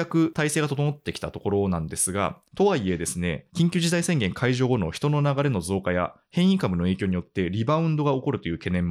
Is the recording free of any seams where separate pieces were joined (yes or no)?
no